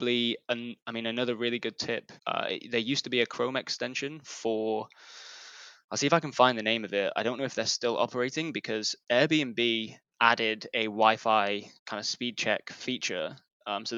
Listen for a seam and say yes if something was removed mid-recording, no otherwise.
yes